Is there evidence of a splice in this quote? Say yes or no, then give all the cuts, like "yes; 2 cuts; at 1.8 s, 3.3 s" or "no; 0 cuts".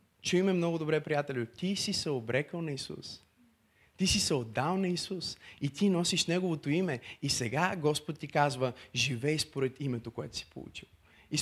no; 0 cuts